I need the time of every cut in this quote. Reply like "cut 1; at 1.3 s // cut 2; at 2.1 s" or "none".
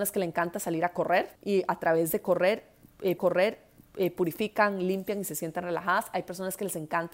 cut 1; at 1.4 s // cut 2; at 3.2 s